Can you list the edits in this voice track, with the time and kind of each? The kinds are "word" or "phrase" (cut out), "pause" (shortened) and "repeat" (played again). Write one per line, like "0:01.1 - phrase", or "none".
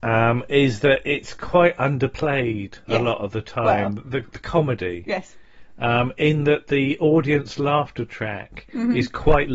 0:02.8 - pause